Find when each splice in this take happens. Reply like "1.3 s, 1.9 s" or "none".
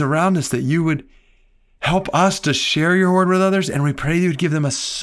none